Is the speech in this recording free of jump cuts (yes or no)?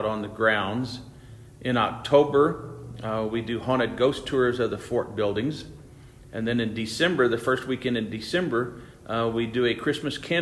yes